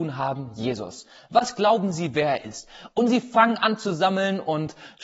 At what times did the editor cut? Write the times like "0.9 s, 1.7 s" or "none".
none